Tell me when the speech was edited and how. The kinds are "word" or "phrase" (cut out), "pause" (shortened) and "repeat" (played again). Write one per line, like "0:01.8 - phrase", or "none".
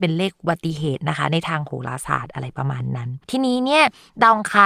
0:03.2 - pause